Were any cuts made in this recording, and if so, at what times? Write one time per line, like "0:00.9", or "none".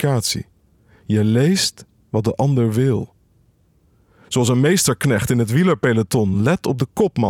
none